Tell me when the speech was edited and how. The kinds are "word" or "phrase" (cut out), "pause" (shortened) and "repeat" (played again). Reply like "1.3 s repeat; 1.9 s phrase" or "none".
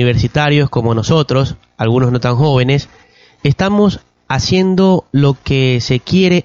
none